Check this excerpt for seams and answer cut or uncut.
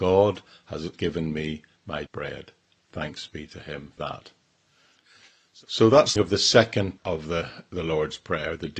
cut